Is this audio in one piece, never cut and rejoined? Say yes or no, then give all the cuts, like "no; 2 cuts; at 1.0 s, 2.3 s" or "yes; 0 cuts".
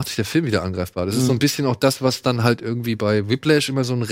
yes; 0 cuts